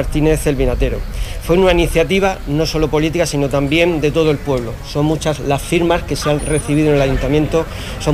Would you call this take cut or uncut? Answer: cut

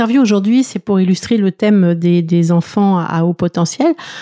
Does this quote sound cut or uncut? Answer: uncut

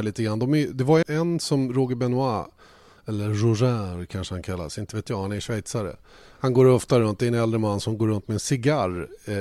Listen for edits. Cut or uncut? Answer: cut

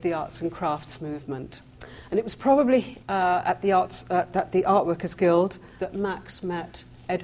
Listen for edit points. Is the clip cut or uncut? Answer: uncut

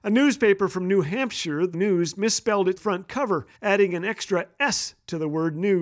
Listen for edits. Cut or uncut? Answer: cut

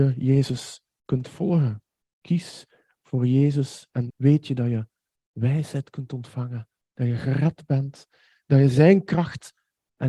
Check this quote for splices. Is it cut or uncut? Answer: cut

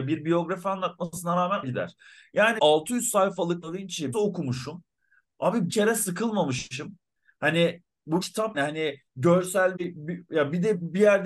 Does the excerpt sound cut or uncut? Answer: cut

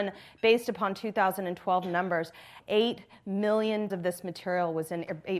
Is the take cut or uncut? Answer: cut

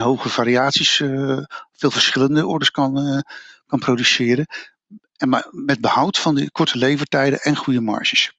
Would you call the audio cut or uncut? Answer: uncut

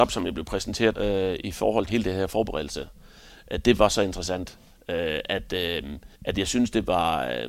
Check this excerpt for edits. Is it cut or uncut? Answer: cut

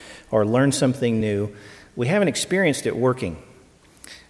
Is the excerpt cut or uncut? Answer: uncut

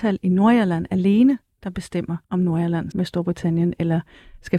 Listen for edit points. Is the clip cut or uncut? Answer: cut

